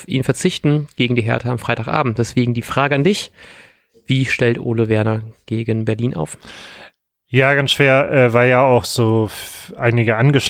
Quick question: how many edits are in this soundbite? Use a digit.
0